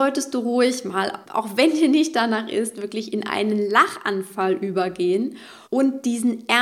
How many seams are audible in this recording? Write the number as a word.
two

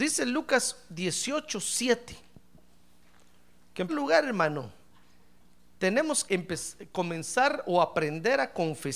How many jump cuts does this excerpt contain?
two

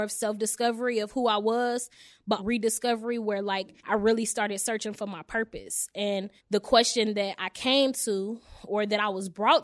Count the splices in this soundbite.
three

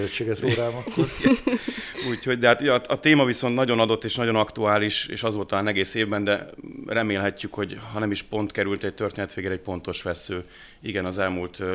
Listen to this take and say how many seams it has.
zero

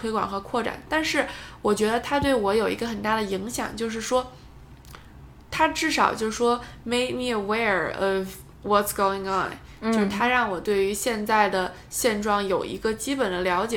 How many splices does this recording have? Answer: one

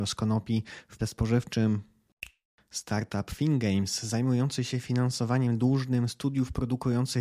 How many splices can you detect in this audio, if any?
one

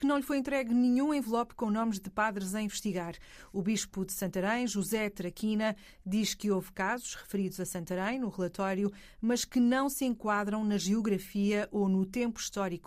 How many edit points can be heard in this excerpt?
zero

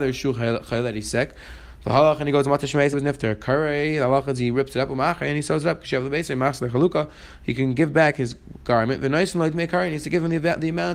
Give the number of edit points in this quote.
one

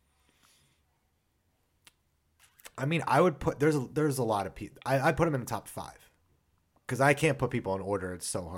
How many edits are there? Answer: zero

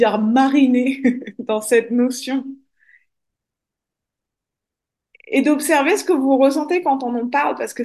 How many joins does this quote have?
zero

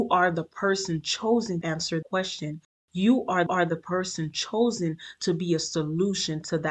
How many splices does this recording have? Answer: three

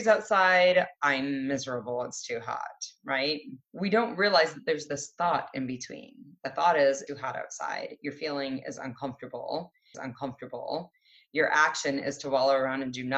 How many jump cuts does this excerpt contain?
three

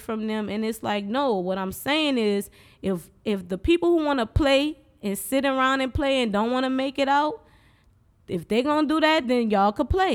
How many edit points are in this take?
zero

